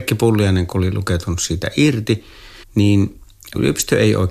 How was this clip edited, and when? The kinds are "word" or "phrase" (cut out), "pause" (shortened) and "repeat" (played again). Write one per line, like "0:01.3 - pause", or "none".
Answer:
0:02.6 - pause